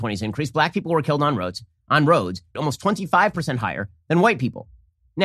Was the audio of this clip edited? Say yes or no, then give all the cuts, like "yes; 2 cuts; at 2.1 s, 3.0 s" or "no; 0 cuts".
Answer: yes; 1 cut; at 2.5 s